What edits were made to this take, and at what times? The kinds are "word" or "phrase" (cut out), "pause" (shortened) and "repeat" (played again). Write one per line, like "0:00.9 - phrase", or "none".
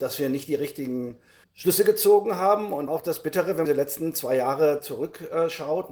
0:01.4 - pause
0:02.9 - phrase
0:03.7 - phrase